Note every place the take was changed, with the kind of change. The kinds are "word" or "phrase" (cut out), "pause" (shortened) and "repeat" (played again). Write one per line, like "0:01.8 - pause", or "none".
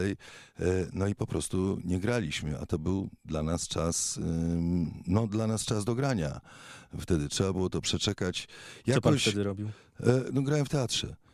none